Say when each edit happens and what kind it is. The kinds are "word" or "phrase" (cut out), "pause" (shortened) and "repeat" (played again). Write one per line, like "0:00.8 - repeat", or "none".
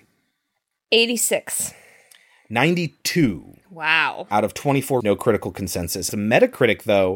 0:05.0 - word
0:06.1 - word